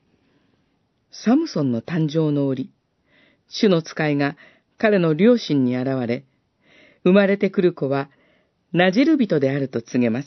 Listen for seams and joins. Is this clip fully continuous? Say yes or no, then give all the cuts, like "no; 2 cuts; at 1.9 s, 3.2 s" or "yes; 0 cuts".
yes; 0 cuts